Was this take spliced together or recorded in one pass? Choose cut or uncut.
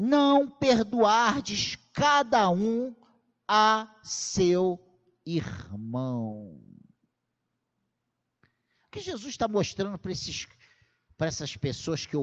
uncut